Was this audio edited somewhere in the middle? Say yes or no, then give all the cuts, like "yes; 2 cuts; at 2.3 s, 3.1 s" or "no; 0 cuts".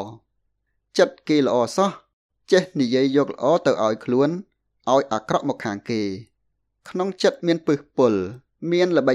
no; 0 cuts